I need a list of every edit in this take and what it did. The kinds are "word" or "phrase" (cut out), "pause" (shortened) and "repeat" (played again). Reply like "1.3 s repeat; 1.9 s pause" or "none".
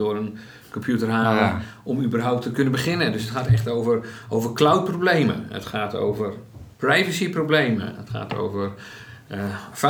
6.7 s pause